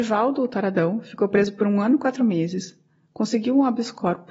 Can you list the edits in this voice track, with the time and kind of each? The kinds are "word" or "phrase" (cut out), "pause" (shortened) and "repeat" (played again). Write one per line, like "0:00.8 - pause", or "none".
none